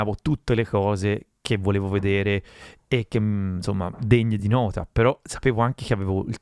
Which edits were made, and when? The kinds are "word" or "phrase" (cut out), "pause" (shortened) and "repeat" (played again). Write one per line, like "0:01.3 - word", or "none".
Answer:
none